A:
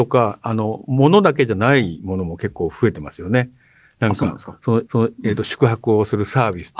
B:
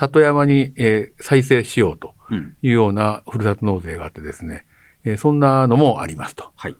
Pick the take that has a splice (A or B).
A